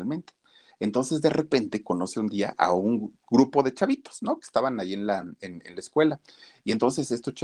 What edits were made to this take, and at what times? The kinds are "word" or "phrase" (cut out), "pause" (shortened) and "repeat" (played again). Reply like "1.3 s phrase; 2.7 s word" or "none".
none